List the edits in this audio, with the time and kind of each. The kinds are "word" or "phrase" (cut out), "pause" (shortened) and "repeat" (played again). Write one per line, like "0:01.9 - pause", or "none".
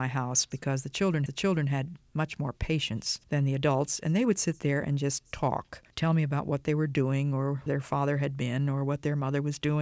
0:01.3 - repeat
0:03.2 - pause
0:05.9 - pause
0:07.7 - word